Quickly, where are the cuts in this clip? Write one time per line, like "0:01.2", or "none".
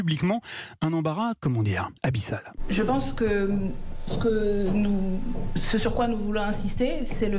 0:02.0